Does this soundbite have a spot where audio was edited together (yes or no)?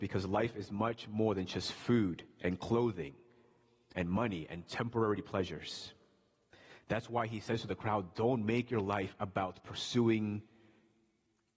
no